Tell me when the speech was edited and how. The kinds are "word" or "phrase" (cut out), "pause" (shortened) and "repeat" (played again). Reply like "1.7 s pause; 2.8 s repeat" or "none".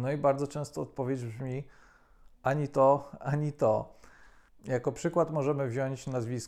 2.3 s pause